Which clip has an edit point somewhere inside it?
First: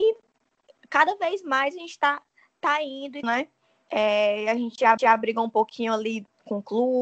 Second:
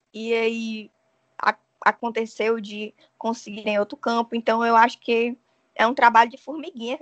first; 2 cuts; at 3.2 s, 5.0 s

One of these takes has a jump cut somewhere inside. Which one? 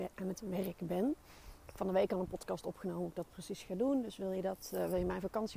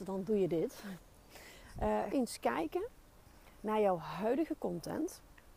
second; 1 cut; at 2.1 s

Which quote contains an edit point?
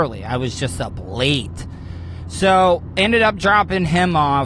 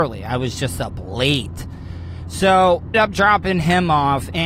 second; 1 cut; at 2.9 s

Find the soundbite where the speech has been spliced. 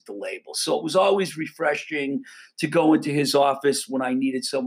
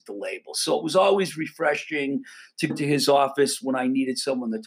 second; 1 cut; at 2.7 s

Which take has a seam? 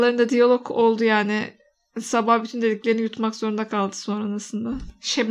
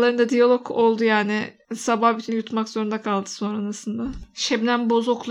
second; 2 cuts; at 1.6 s, 2.3 s

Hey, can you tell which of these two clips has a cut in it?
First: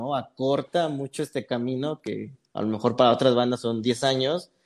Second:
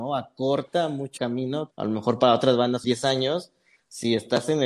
second; 3 cuts; at 1.2 s, 1.7 s, 2.8 s

